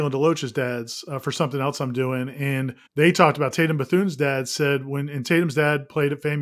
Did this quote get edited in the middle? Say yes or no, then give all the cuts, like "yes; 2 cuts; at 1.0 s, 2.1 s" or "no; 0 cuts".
yes; 1 cut; at 2.9 s